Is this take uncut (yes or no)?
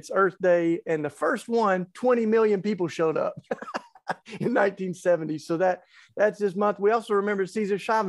yes